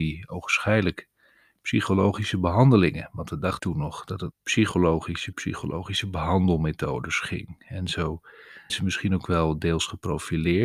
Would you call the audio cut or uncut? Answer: cut